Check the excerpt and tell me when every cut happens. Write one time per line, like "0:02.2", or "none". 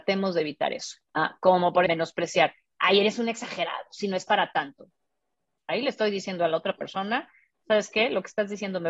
0:01.0
0:01.9

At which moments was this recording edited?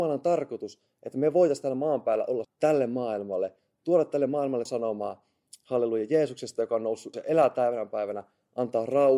0:02.4
0:04.7
0:07.1

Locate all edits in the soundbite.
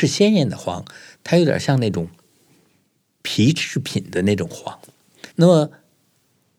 0:05.3

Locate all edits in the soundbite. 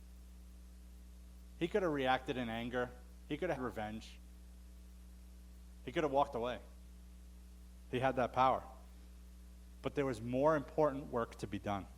0:03.6

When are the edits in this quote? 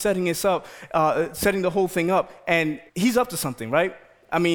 0:02.9

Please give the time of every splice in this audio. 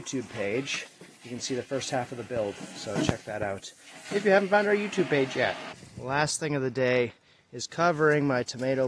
none

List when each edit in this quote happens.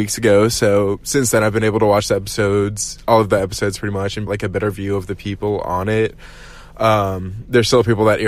0:04.3

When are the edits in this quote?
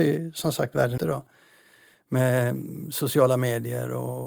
0:01.0

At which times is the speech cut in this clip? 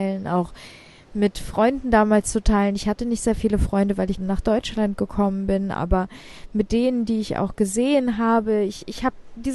0:04.2

